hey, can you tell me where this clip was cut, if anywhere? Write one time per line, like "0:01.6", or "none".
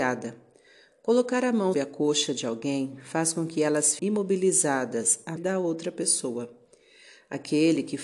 0:01.7
0:04.0
0:05.4